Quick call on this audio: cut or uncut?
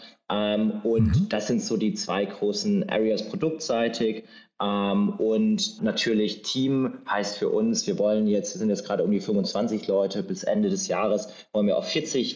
cut